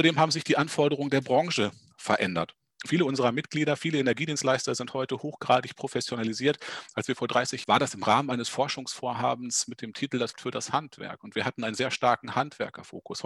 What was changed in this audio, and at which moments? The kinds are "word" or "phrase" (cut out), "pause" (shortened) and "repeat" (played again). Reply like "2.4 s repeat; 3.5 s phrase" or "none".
2.7 s pause; 7.6 s phrase; 10.3 s word